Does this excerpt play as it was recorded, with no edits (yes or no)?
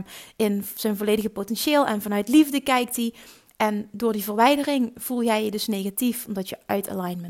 yes